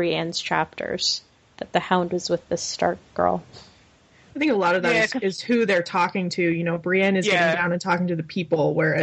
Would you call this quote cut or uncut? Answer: uncut